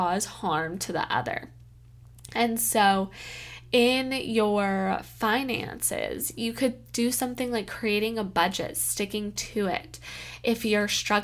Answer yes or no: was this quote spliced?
no